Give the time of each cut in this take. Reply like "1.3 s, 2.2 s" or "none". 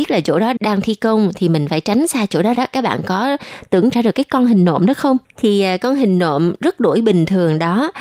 2.5 s, 3.9 s, 5.2 s